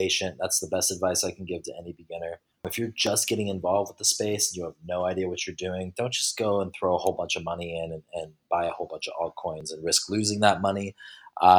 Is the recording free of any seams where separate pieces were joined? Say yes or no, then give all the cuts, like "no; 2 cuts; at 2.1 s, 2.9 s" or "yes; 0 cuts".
yes; 0 cuts